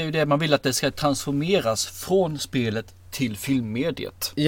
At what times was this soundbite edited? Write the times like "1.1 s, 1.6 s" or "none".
none